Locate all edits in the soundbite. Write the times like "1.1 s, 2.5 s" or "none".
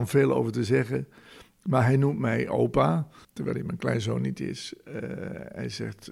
3.2 s